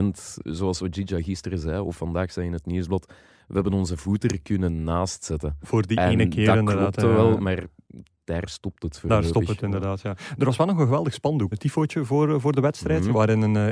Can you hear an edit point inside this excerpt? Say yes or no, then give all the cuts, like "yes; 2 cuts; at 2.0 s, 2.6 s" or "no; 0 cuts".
yes; 1 cut; at 11.5 s